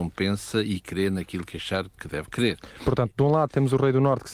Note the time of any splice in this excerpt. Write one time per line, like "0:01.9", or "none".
0:01.9